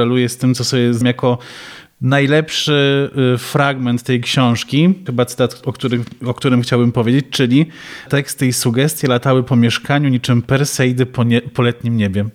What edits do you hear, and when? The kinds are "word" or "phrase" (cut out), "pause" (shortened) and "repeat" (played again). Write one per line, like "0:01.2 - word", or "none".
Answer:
0:01.0 - word
0:05.1 - word
0:08.1 - word